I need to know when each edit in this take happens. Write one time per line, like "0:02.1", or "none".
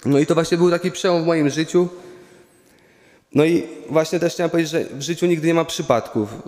none